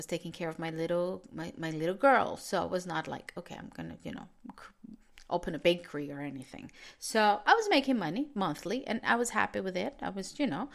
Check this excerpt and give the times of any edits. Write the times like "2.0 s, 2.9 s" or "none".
none